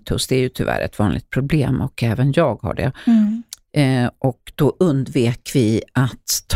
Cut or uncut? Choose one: uncut